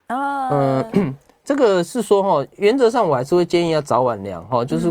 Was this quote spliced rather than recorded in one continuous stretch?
no; 0 cuts

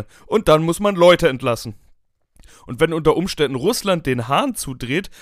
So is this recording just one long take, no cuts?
yes; 0 cuts

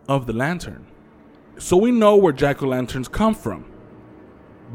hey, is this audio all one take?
yes; 0 cuts

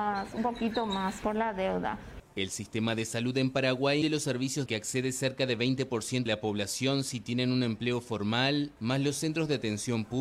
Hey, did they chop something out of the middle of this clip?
yes; 5 cuts; at 1.2 s, 2.3 s, 4.0 s, 4.7 s, 6.3 s

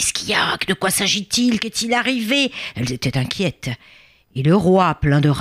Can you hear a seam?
no; 0 cuts

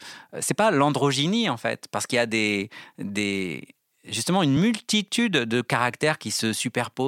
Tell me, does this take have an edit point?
no; 0 cuts

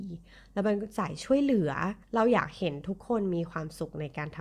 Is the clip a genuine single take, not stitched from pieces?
no; 1 cut; at 2.0 s

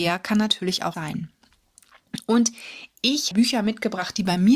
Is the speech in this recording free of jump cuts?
no; 2 cuts; at 0.9 s, 3.3 s

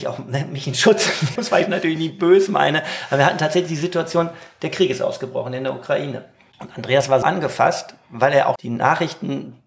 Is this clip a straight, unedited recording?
no; 3 cuts; at 1.3 s, 7.2 s, 8.5 s

